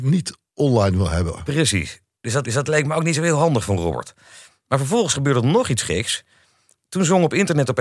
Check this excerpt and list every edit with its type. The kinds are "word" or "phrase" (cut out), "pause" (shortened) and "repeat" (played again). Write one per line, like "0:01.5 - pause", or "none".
0:02.4 - repeat

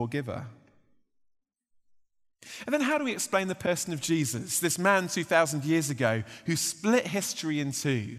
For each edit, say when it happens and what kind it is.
none

